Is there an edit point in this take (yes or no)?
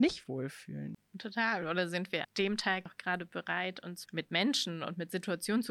yes